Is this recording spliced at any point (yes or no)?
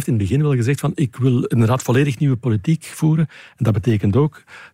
no